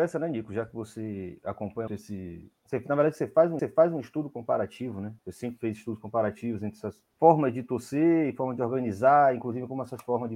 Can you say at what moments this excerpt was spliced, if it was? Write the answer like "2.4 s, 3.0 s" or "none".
1.9 s, 3.6 s, 5.2 s, 7.1 s

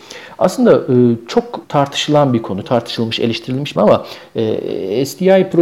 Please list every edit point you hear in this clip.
1.6 s, 2.6 s, 3.8 s

